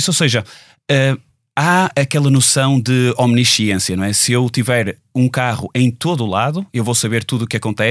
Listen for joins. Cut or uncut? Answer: uncut